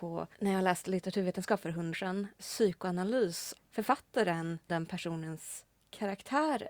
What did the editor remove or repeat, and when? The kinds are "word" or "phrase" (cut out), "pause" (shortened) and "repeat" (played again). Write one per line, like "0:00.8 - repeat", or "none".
0:01.9 - word
0:03.6 - word
0:04.7 - word